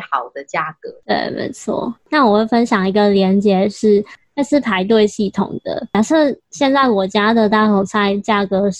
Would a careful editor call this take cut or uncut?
cut